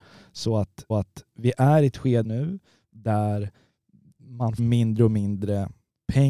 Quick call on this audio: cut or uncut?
cut